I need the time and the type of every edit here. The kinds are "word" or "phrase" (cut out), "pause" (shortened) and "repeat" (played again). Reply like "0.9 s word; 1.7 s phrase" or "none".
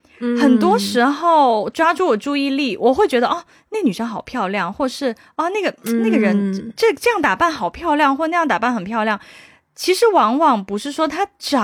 none